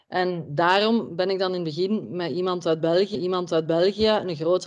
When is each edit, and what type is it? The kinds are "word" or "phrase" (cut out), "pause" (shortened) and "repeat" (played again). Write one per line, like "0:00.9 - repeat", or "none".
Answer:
0:03.1 - repeat